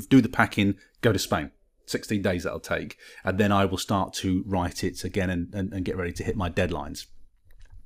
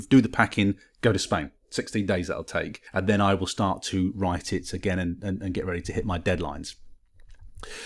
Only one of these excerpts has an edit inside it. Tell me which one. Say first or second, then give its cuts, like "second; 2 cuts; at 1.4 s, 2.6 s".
second; 2 cuts; at 1.6 s, 2.9 s